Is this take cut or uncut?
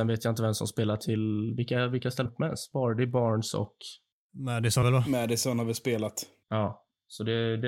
cut